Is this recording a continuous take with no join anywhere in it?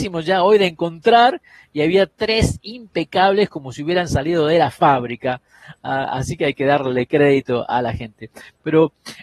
yes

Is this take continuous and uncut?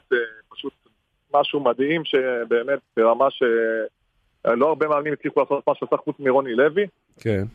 yes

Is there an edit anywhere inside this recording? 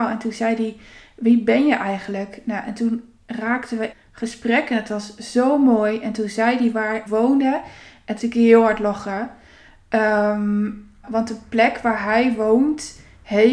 yes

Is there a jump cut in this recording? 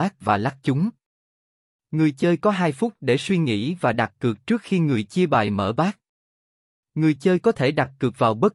no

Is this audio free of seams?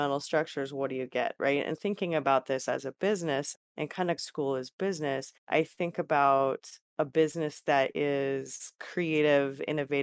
no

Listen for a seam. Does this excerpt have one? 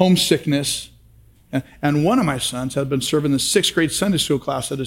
no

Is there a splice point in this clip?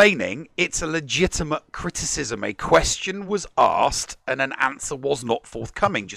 no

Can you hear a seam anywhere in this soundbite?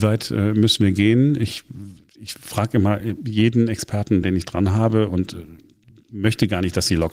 no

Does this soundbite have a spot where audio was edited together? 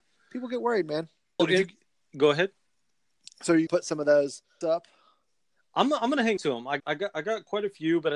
yes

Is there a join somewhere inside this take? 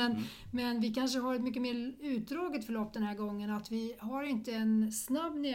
no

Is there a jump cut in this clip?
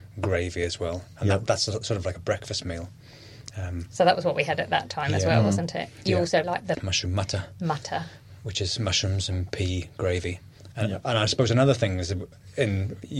yes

